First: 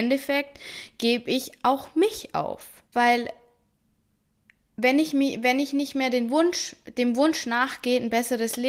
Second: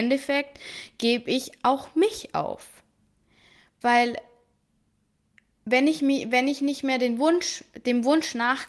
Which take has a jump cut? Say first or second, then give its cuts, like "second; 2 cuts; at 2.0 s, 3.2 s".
first; 1 cut; at 2.9 s